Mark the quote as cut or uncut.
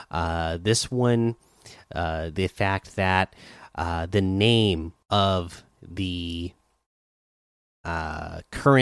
cut